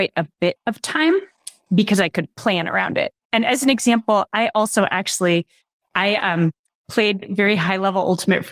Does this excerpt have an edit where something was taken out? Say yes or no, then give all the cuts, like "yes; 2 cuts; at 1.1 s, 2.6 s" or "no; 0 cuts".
no; 0 cuts